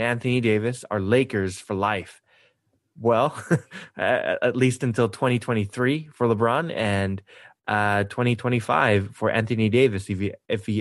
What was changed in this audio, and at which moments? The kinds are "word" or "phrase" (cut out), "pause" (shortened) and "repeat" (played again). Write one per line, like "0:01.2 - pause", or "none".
none